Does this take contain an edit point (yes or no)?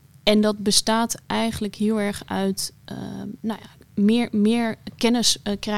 no